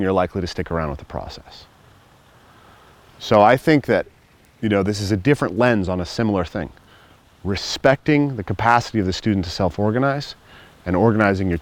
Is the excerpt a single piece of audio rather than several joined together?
yes; 0 cuts

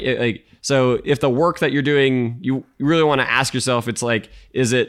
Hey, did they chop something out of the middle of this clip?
no; 0 cuts

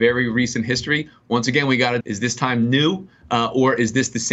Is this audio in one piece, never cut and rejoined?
no; 1 cut; at 2.0 s

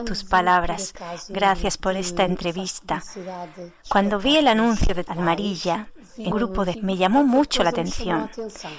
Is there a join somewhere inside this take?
yes; 3 cuts; at 5.1 s, 6.3 s, 6.7 s

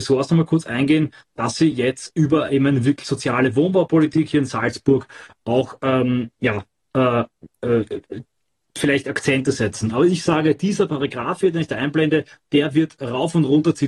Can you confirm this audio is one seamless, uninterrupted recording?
yes; 0 cuts

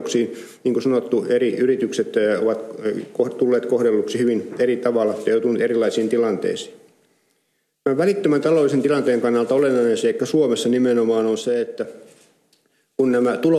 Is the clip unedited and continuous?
yes; 0 cuts

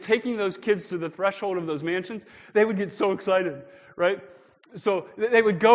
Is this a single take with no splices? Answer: yes; 0 cuts

